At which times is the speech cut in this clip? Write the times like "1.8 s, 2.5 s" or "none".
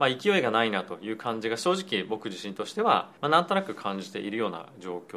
3.2 s